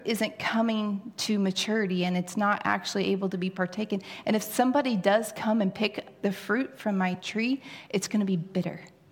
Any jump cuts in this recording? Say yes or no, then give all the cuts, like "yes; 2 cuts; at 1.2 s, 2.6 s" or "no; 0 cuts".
no; 0 cuts